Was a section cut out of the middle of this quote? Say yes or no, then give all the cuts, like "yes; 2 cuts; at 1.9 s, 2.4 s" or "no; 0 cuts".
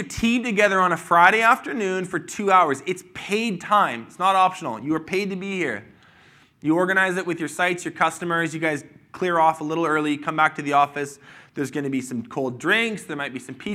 no; 0 cuts